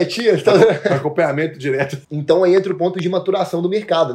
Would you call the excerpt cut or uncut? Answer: cut